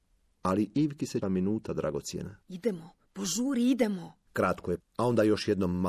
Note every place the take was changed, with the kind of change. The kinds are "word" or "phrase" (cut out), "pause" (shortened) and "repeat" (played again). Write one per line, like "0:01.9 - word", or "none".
0:01.2 - phrase
0:02.4 - pause
0:04.8 - word